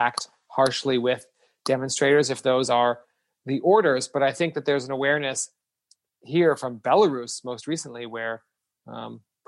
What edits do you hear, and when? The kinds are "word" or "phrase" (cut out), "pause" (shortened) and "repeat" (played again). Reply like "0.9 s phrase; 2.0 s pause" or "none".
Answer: none